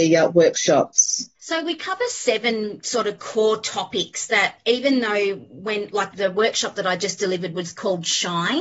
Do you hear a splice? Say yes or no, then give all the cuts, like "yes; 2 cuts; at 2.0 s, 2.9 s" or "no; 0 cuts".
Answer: yes; 2 cuts; at 1.4 s, 6.1 s